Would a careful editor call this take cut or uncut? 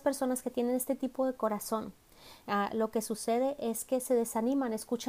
uncut